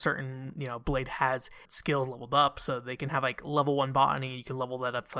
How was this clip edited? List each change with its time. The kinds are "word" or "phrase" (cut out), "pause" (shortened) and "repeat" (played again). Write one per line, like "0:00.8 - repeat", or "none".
0:01.6 - word